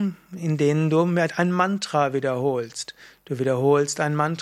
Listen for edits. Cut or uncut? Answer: uncut